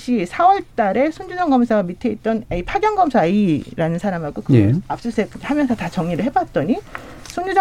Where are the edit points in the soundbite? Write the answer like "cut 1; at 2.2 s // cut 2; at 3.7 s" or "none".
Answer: none

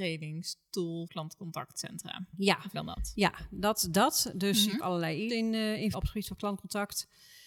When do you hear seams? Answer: cut 1; at 1.1 s // cut 2; at 2.7 s // cut 3; at 4.8 s // cut 4; at 5.3 s // cut 5; at 5.9 s

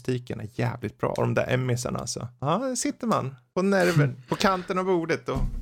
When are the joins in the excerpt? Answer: none

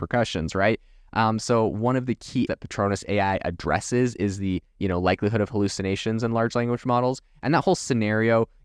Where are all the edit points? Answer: cut 1; at 2.5 s

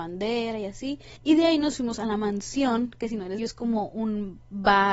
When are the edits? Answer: cut 1; at 1.2 s // cut 2; at 3.4 s

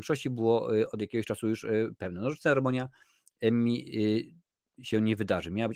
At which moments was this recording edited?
none

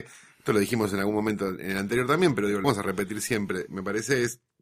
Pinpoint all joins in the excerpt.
cut 1; at 2.6 s

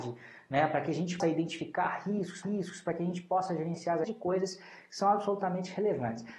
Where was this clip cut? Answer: cut 1; at 1.2 s // cut 2; at 2.4 s // cut 3; at 4.0 s

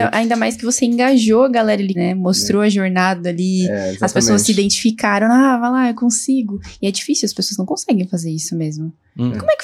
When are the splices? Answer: cut 1; at 1.9 s

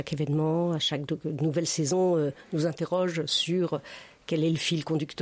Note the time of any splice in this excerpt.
none

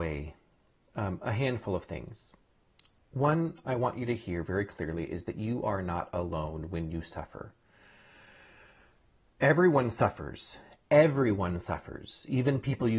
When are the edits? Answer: none

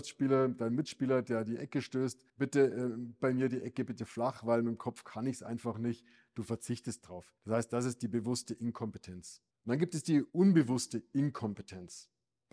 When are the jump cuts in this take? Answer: cut 1; at 2.3 s // cut 2; at 7.4 s // cut 3; at 9.5 s // cut 4; at 10.3 s

